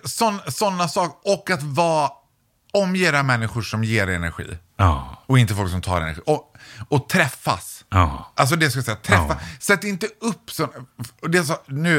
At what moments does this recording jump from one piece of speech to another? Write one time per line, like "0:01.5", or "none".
none